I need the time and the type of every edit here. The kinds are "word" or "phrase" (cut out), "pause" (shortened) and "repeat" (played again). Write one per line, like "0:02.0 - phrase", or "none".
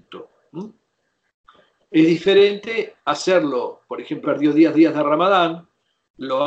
0:04.2 - word
0:04.7 - repeat